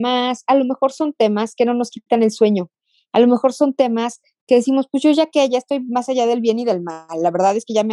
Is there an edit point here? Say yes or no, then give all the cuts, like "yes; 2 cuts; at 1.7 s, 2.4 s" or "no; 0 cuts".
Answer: no; 0 cuts